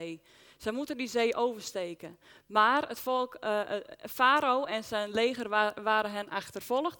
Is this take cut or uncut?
uncut